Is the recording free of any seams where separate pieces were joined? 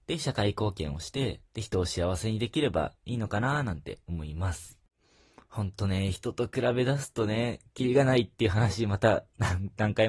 no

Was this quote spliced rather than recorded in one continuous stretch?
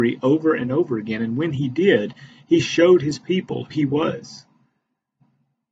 yes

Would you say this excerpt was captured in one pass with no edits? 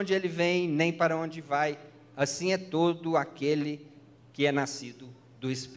yes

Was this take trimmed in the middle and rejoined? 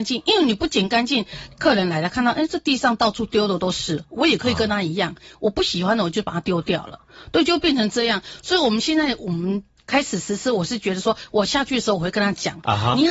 no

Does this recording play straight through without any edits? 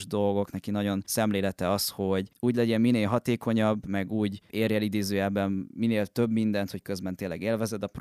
yes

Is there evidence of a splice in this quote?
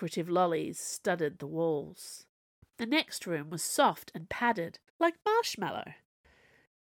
yes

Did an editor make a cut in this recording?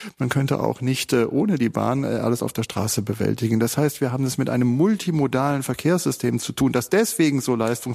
no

